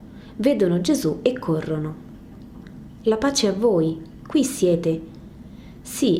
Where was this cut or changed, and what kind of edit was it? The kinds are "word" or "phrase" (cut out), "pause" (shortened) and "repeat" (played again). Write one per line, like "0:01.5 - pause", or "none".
none